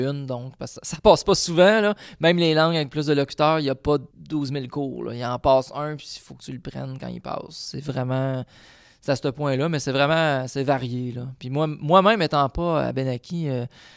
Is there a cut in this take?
yes; 1 cut; at 4.1 s

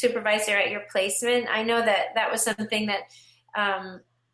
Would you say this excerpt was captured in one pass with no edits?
yes; 0 cuts

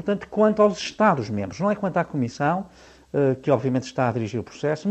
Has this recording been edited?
no; 0 cuts

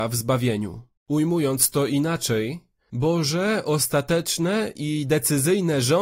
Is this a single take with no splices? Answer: no; 1 cut; at 1.0 s

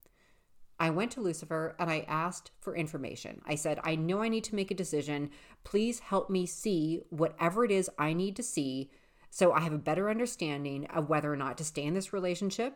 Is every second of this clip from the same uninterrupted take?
yes; 0 cuts

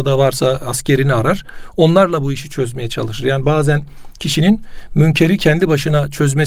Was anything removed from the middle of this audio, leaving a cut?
no; 0 cuts

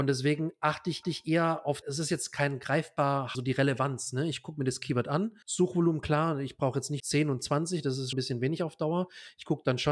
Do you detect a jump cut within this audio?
yes; 6 cuts; at 1.0 s, 1.8 s, 3.3 s, 5.4 s, 7.0 s, 8.1 s

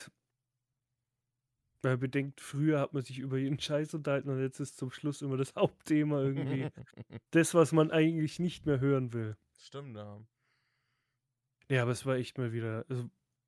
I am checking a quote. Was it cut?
no; 0 cuts

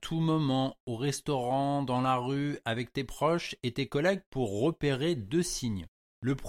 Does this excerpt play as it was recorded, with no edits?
yes; 0 cuts

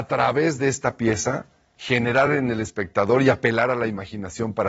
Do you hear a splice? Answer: no; 0 cuts

